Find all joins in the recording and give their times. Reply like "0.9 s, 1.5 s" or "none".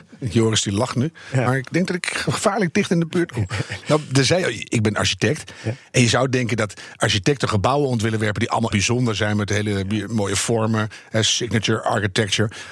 8.7 s